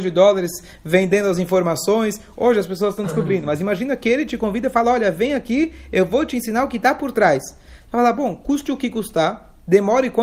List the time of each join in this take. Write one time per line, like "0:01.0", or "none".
none